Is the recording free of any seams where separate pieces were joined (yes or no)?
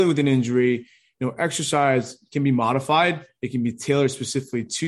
yes